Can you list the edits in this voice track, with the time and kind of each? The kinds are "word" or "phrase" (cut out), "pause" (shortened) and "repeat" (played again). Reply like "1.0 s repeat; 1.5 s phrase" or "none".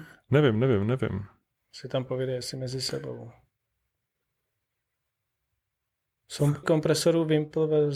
6.6 s word